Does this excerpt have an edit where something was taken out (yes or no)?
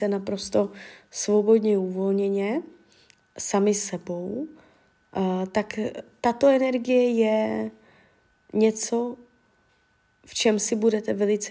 no